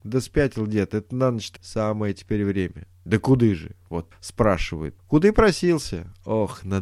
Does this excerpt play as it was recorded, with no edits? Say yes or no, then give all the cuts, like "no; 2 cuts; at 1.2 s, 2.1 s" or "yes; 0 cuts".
no; 3 cuts; at 1.6 s, 4.1 s, 5.0 s